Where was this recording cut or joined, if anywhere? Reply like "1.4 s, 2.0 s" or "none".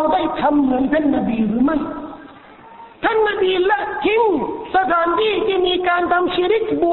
2.9 s